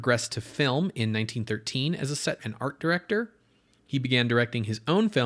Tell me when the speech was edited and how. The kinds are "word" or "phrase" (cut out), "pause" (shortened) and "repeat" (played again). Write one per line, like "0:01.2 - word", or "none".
0:02.4 - word